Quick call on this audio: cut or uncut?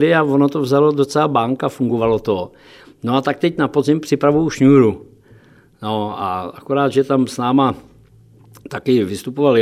uncut